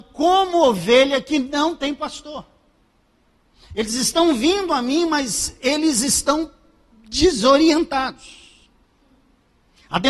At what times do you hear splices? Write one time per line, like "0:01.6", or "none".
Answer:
none